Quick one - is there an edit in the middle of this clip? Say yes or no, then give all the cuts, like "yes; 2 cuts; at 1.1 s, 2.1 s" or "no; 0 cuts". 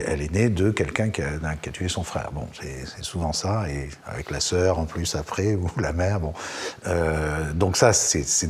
no; 0 cuts